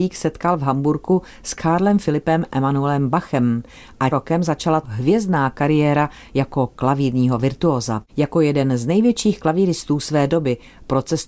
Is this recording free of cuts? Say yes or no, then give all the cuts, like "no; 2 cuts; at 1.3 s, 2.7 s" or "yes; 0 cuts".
no; 3 cuts; at 4.1 s, 4.8 s, 8.1 s